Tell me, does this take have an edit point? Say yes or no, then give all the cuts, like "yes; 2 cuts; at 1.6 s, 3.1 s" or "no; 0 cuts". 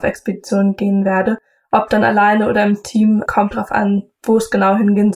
yes; 1 cut; at 3.3 s